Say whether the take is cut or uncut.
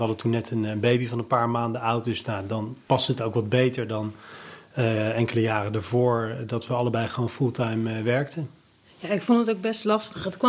uncut